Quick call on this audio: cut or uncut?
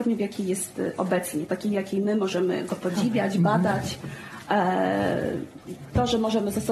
uncut